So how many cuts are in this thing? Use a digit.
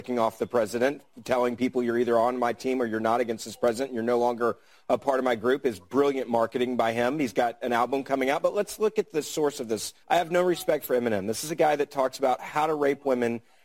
1